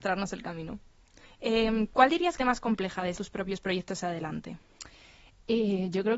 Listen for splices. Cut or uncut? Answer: cut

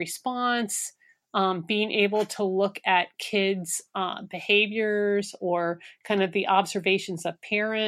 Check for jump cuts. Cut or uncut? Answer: uncut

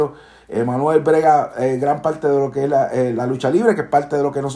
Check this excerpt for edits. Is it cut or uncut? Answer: uncut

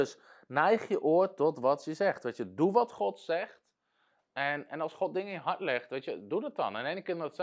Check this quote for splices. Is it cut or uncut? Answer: uncut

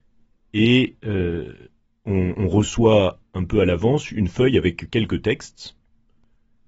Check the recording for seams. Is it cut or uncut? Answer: uncut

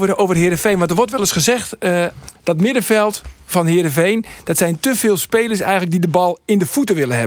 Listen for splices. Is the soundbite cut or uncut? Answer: uncut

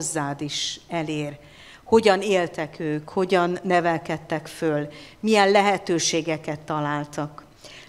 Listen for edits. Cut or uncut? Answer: uncut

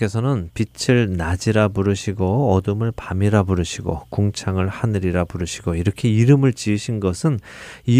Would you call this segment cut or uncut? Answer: uncut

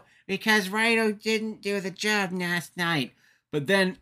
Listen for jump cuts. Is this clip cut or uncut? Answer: uncut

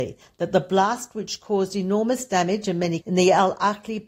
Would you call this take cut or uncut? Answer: cut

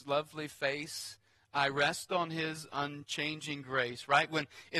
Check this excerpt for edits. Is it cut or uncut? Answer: uncut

